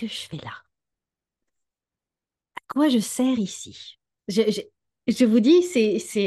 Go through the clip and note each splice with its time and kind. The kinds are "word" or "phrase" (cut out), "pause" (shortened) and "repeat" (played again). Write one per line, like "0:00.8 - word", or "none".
none